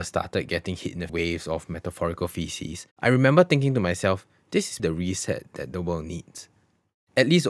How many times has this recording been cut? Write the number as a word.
three